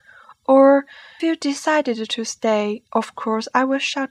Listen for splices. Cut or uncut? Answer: cut